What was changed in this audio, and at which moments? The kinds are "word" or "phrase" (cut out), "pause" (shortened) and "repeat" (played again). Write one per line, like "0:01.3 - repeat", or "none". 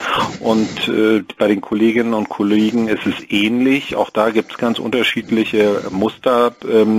0:04.6 - word